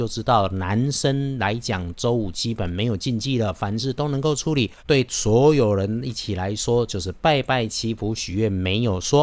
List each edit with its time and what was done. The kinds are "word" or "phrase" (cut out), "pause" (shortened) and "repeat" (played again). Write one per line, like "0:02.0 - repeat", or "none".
0:04.8 - pause